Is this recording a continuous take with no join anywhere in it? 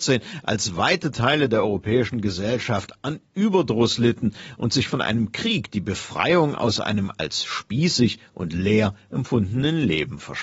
yes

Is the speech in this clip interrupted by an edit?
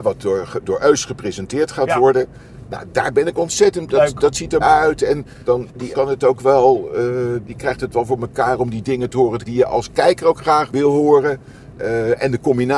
yes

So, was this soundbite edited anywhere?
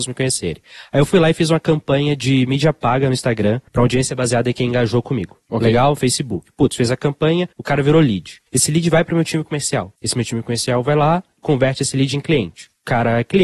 yes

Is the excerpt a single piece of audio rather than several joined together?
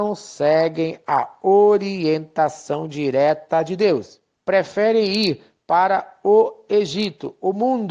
no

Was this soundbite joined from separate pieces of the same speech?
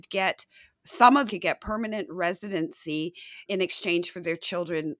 yes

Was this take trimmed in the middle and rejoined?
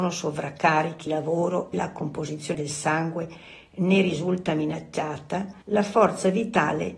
yes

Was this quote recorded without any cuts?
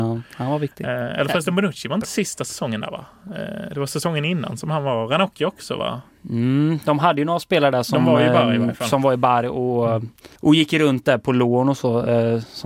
no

